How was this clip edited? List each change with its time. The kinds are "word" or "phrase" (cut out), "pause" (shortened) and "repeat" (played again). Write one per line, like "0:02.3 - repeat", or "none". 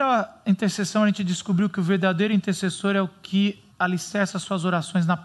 0:03.7 - pause